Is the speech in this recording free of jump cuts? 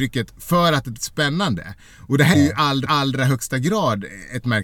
no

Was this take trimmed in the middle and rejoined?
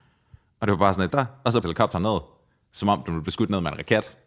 yes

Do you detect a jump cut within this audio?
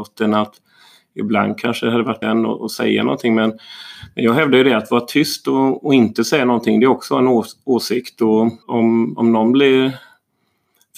yes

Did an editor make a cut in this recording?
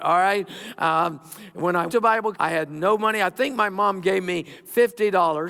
yes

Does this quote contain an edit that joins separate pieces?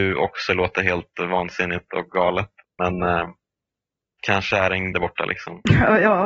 yes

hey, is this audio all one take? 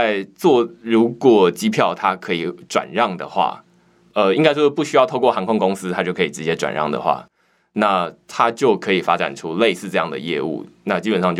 yes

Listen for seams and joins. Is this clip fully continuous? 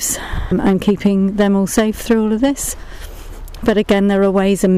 yes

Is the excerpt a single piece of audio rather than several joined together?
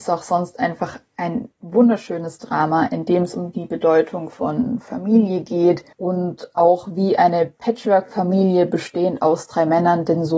no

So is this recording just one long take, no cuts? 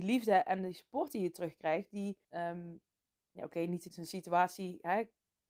no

